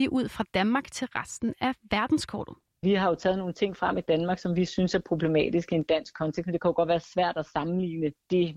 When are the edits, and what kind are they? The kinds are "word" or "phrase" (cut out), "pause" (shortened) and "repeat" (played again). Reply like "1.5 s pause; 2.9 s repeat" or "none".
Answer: none